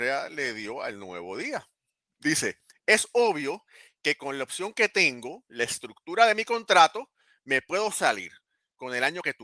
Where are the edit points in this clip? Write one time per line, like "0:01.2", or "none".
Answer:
none